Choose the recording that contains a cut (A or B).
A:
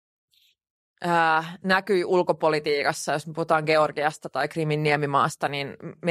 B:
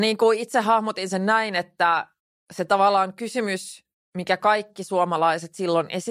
B